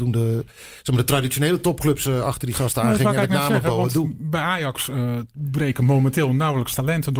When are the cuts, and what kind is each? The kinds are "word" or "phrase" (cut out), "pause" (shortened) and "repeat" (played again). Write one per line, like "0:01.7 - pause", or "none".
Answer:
none